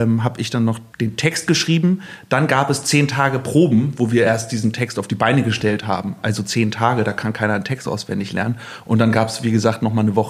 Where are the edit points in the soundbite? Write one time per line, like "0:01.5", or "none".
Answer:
0:00.9